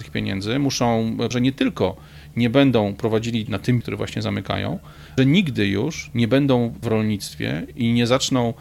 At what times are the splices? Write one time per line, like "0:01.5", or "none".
0:01.3
0:03.5
0:03.8
0:05.2
0:06.8

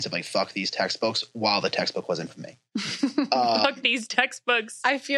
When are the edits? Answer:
0:02.3

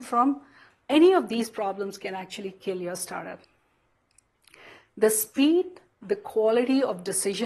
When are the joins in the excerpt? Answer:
none

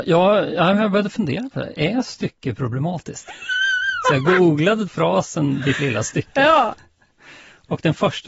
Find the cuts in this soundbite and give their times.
0:04.9

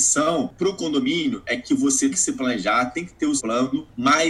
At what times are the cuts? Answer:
0:02.1
0:03.4

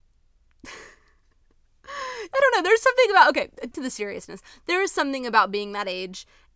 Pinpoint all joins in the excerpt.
0:03.7

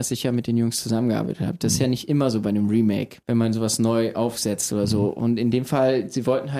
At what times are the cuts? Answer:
0:03.2

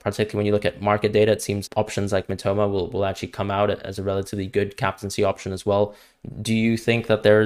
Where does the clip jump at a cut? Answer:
0:01.7

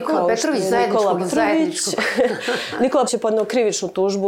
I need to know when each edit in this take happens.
0:01.2
0:03.1

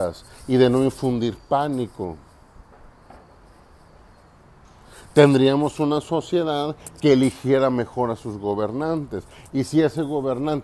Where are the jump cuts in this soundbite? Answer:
none

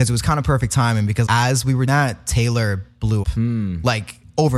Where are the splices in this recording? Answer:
0:01.3
0:01.9
0:03.2

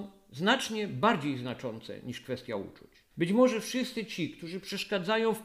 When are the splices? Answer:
0:03.1

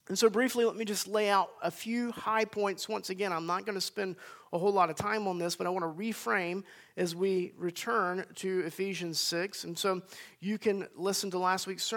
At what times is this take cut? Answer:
none

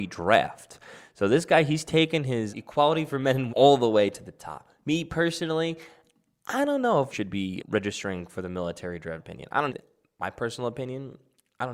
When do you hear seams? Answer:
0:02.5
0:03.5
0:07.1
0:07.6
0:09.2
0:09.7

